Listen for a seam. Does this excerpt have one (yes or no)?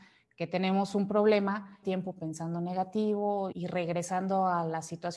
yes